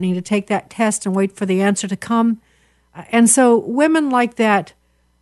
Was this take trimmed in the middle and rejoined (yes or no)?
no